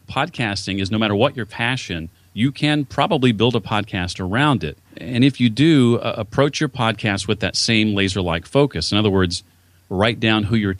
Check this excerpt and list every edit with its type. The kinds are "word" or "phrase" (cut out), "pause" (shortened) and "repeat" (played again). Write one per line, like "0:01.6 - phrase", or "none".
0:02.1 - pause
0:04.9 - pause